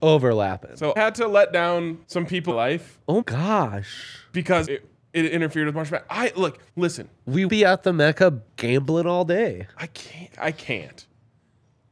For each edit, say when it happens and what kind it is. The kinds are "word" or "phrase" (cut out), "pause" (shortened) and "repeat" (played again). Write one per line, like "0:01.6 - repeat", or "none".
0:01.0 - word
0:02.0 - pause
0:02.5 - phrase
0:03.2 - word
0:04.7 - word
0:06.7 - pause
0:07.5 - word
0:08.5 - pause
0:10.3 - word